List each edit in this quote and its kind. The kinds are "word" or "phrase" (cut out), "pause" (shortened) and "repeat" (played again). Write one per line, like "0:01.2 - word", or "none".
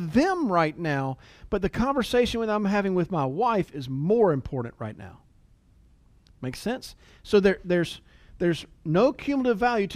none